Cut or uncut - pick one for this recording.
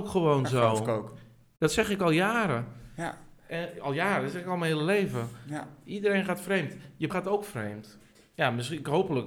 cut